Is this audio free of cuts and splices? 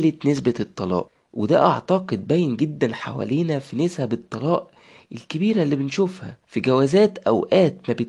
yes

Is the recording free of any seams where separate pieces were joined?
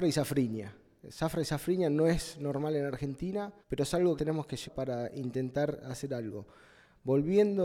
no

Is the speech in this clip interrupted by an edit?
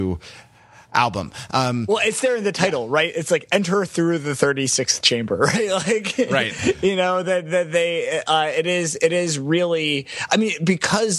no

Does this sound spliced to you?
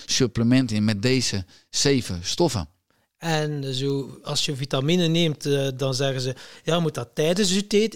no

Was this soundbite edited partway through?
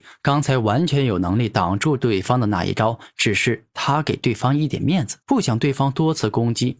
yes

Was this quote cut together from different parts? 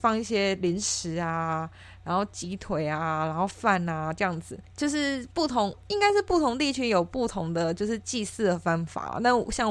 no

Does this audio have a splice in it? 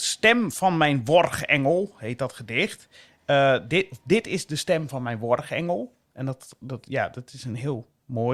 no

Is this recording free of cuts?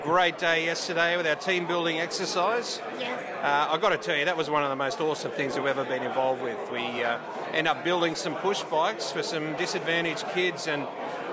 yes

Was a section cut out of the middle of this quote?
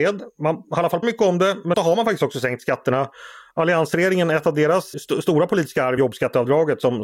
yes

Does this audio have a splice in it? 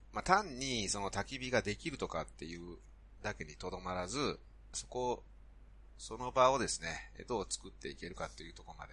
yes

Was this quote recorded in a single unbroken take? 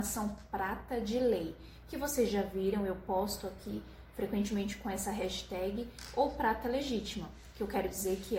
yes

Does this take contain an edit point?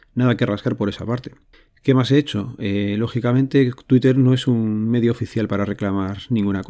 no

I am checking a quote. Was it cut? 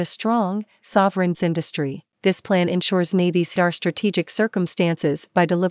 yes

